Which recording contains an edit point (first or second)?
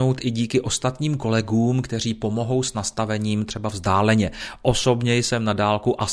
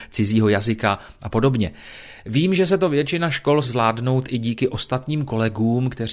second